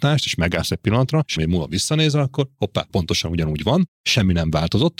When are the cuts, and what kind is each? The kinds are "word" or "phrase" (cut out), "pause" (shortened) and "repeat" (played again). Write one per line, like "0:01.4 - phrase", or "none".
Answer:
0:01.4 - word
0:02.9 - word